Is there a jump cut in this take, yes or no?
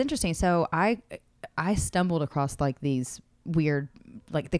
no